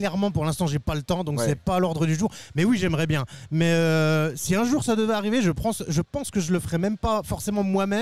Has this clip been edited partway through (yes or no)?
no